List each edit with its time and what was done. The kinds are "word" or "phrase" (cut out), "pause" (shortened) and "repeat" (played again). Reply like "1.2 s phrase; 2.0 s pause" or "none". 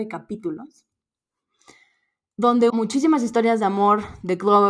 2.7 s word